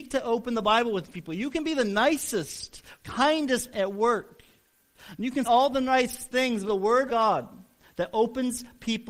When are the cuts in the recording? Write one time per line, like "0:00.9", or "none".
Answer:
0:03.0
0:03.7
0:05.4
0:06.7
0:07.1